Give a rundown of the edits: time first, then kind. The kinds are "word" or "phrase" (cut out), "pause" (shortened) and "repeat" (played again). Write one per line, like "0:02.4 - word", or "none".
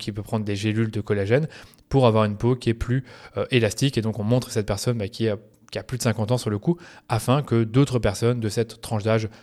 none